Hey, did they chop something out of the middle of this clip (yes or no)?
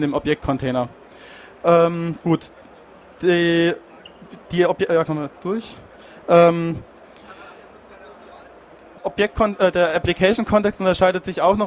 yes